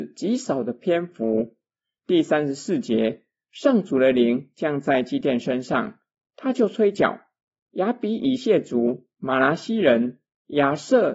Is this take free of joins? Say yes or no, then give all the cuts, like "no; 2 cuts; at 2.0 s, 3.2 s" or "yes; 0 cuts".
yes; 0 cuts